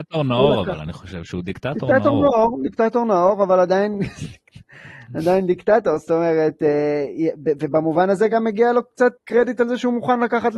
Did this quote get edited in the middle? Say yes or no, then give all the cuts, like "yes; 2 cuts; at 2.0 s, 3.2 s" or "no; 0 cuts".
yes; 1 cut; at 9.2 s